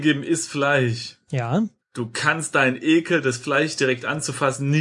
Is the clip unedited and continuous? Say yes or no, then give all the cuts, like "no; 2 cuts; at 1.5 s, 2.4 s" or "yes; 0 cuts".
no; 1 cut; at 1.8 s